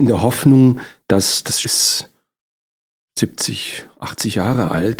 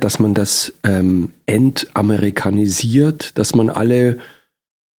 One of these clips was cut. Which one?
first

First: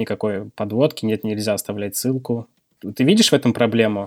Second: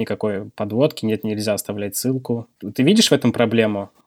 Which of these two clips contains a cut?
second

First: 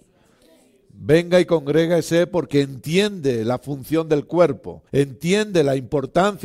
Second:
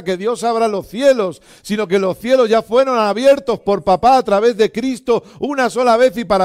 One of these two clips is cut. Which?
first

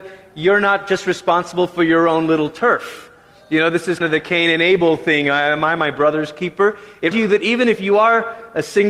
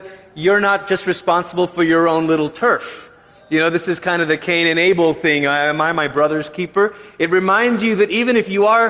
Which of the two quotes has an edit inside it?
first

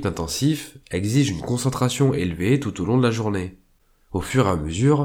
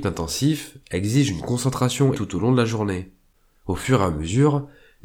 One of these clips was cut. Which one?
second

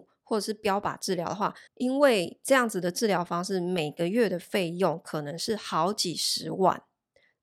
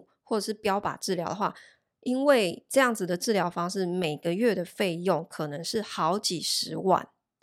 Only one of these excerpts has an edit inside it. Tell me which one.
first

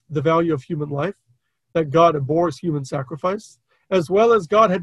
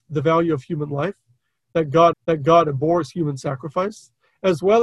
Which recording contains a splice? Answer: second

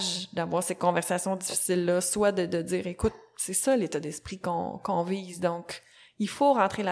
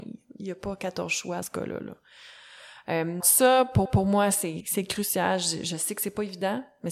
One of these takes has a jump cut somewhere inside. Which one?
second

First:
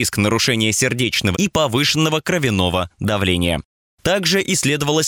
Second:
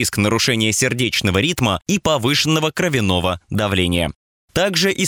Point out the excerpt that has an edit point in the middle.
first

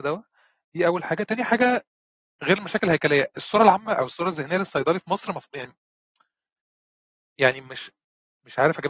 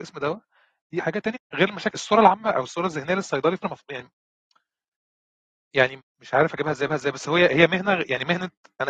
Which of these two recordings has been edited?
second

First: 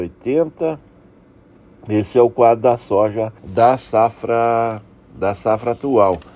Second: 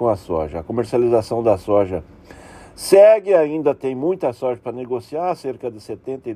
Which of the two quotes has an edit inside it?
first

